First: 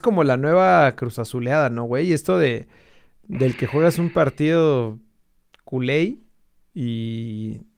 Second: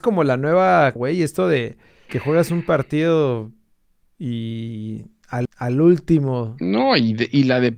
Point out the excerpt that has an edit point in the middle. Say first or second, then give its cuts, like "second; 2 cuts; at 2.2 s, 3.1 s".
second; 4 cuts; at 1.0 s, 2.1 s, 4.0 s, 5.5 s